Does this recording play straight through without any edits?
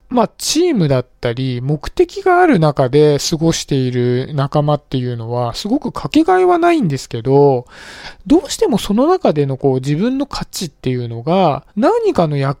no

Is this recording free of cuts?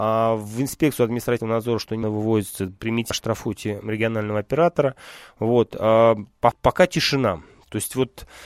no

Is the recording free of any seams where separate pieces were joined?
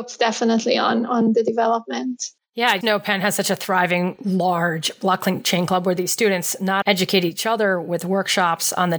no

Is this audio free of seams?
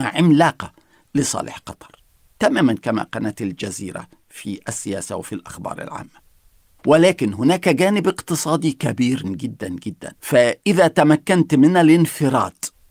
no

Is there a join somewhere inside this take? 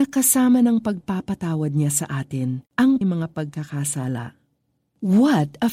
yes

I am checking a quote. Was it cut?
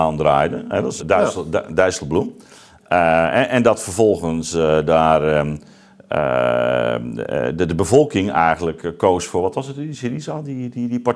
yes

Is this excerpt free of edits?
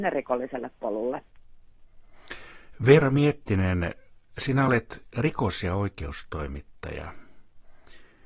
yes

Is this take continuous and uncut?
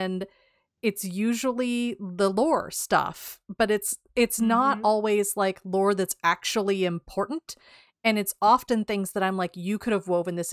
yes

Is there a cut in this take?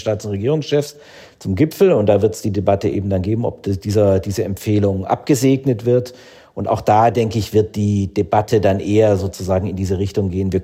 no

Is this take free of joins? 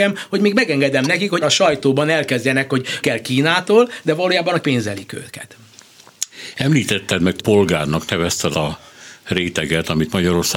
no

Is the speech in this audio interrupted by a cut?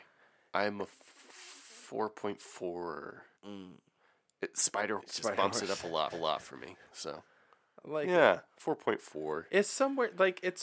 yes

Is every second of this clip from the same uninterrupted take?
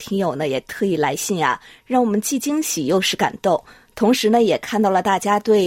yes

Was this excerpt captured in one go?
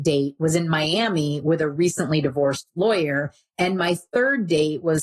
yes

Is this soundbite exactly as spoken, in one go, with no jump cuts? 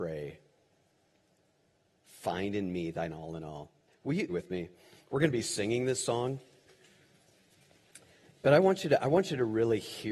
no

